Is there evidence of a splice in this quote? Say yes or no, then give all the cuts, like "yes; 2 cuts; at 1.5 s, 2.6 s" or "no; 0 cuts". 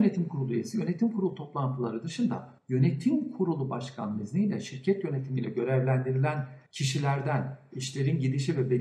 yes; 2 cuts; at 2.6 s, 6.7 s